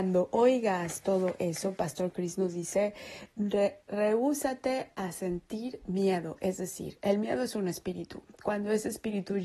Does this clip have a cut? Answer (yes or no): yes